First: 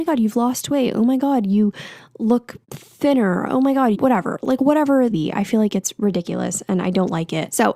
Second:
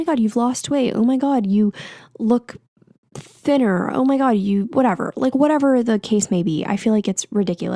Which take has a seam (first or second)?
first